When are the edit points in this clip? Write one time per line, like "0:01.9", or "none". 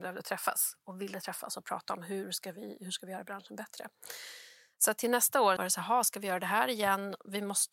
0:05.6